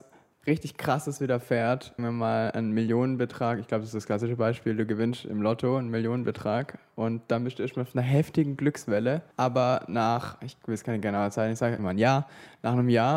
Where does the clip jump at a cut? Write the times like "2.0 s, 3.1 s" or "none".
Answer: 2.0 s, 9.3 s, 11.8 s

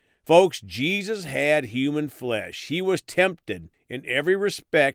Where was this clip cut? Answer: none

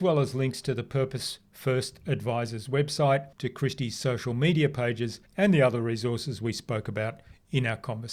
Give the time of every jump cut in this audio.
3.3 s, 5.3 s

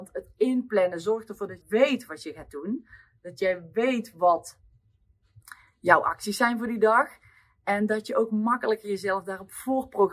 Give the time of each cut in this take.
1.6 s

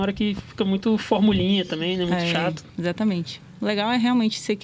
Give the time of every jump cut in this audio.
2.7 s

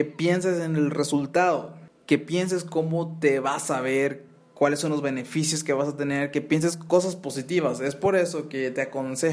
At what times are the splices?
none

